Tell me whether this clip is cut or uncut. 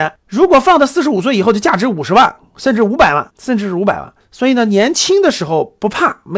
cut